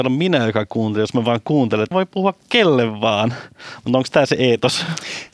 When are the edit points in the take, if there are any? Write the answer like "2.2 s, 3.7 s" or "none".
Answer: 1.9 s

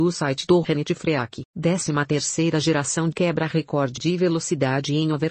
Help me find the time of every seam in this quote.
3.1 s, 4.0 s

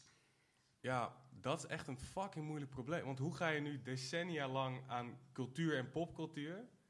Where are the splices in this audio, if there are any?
none

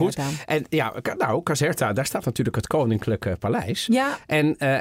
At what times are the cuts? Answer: none

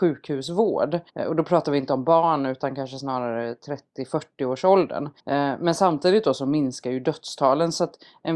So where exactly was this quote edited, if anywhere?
1.1 s, 5.2 s

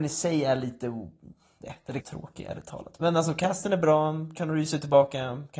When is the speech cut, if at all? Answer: 2.0 s

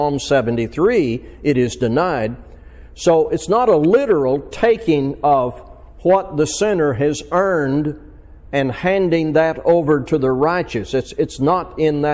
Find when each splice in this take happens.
none

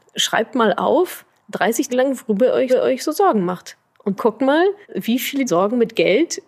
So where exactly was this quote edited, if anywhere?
1.9 s, 2.7 s, 4.2 s, 4.8 s, 5.5 s

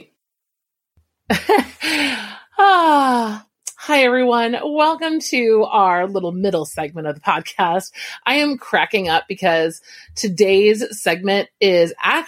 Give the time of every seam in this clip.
none

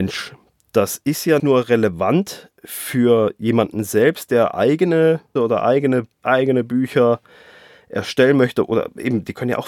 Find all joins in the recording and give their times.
1.4 s, 5.4 s, 6.2 s

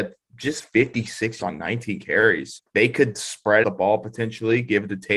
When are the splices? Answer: 1.4 s, 2.6 s, 3.6 s

